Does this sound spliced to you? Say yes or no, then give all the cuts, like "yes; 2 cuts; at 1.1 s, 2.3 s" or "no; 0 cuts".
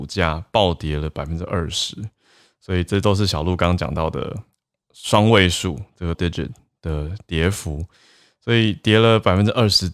yes; 1 cut; at 6.1 s